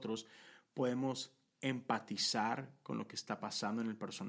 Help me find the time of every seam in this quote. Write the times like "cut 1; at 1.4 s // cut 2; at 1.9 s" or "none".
none